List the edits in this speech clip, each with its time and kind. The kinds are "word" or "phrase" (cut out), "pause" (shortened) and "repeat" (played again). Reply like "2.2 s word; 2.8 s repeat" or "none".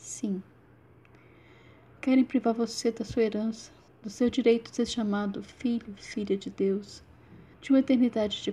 3.9 s pause; 7.5 s pause